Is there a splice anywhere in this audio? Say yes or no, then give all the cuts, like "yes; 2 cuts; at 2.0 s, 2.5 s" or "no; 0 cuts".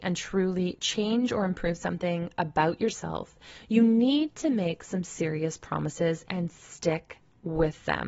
no; 0 cuts